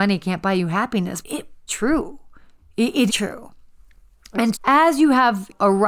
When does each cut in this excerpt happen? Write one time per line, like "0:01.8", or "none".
0:01.2
0:01.7
0:03.1
0:04.5